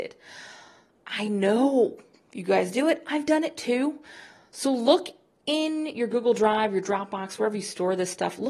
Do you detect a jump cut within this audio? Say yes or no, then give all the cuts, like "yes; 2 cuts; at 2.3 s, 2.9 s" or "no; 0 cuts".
no; 0 cuts